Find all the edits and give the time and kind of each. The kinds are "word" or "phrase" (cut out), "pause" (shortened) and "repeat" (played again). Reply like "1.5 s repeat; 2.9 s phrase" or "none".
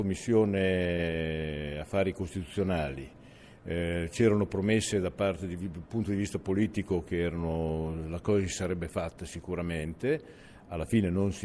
none